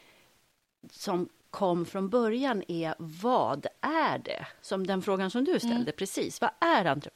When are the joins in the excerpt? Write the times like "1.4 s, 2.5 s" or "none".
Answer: 1.4 s